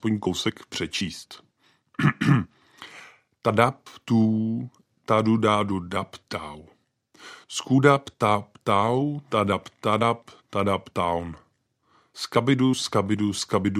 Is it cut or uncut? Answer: uncut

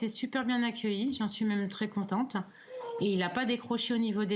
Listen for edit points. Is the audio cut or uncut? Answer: uncut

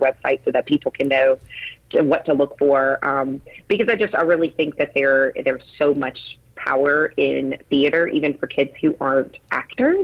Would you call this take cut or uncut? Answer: uncut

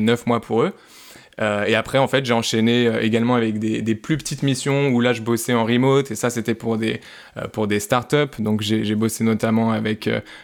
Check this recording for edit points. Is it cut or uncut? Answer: uncut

